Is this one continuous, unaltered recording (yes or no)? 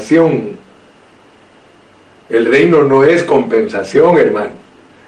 yes